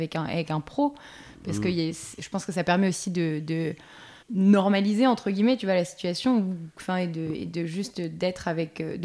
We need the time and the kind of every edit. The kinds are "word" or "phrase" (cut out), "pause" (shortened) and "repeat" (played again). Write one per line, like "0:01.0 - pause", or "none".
0:04.2 - pause